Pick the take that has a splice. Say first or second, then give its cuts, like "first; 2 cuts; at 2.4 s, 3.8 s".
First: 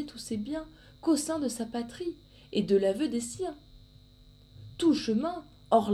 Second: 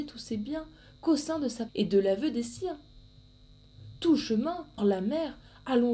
second; 2 cuts; at 1.7 s, 4.8 s